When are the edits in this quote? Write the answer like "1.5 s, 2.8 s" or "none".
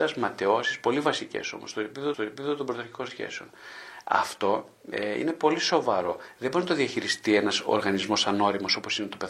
2.1 s